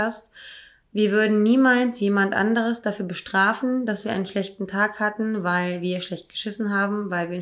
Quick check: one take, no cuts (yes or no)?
yes